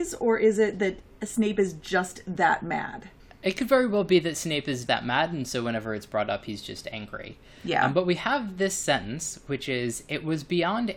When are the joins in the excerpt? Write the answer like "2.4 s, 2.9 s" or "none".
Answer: 4.9 s

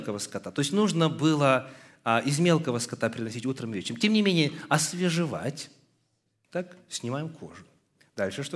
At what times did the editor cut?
none

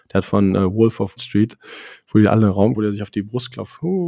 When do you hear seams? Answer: 1.2 s, 2.8 s

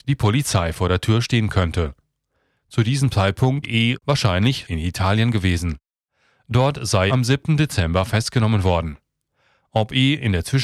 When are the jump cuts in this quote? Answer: 3.6 s, 4.6 s, 7.1 s

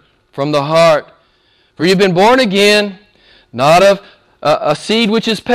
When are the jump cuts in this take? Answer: none

